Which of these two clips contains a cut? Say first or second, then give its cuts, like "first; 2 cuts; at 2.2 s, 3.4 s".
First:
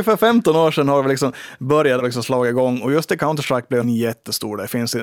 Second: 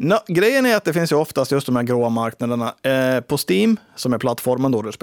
first; 2 cuts; at 2.0 s, 3.8 s